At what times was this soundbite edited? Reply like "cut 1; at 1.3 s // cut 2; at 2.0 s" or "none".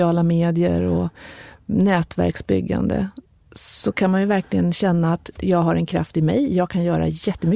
none